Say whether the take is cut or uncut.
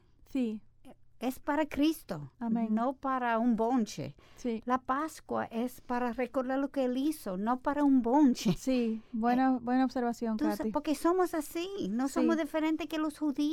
cut